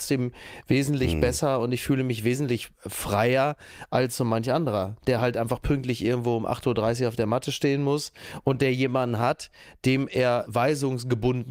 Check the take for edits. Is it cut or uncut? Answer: uncut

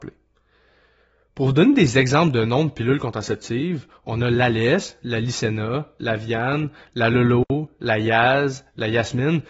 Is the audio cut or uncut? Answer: uncut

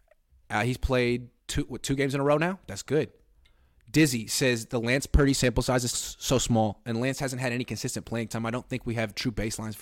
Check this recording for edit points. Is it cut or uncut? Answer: cut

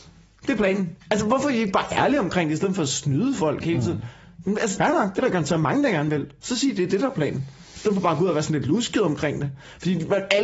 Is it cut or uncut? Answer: cut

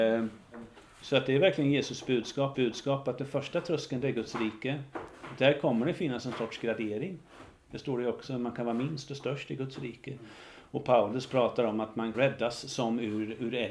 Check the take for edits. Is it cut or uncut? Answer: cut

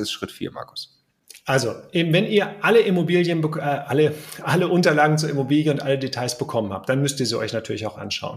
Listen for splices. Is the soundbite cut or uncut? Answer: uncut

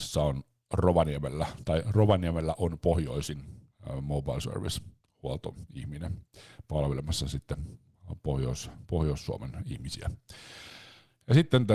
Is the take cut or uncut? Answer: uncut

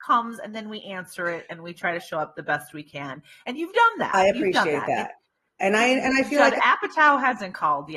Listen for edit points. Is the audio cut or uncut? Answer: uncut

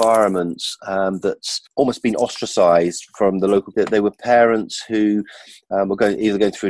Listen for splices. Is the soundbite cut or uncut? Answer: cut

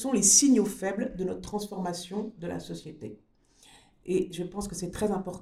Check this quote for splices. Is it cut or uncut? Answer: uncut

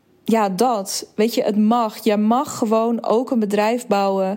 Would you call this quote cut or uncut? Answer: uncut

